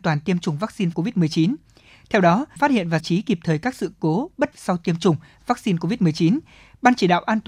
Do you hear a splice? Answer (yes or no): yes